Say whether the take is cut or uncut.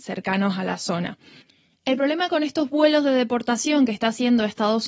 uncut